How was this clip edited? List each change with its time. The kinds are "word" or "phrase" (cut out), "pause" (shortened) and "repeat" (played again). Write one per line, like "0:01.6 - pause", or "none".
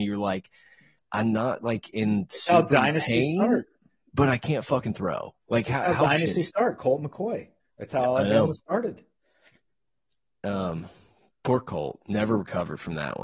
none